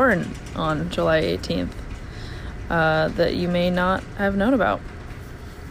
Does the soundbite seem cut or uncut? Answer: uncut